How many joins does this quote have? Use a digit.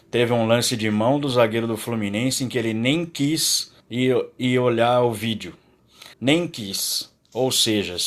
2